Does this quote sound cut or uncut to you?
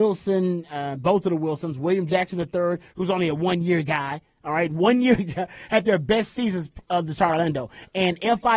uncut